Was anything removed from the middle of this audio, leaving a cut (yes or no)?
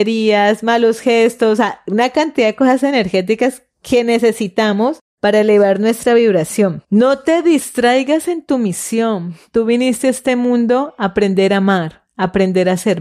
yes